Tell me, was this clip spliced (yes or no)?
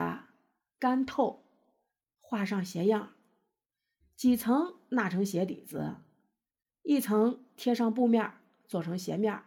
no